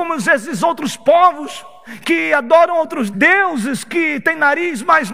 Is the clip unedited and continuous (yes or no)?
no